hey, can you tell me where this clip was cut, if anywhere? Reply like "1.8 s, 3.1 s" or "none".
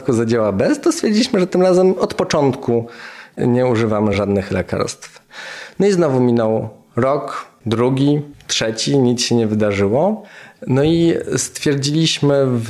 none